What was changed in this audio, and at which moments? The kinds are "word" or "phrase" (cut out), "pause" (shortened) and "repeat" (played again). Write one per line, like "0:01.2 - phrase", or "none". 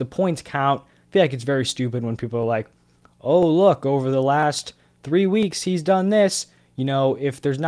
none